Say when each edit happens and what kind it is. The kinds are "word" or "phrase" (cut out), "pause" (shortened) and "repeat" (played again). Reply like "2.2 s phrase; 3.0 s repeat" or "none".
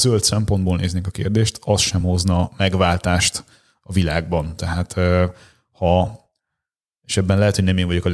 none